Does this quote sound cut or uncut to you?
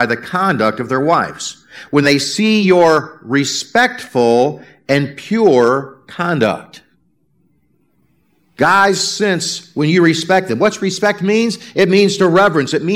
uncut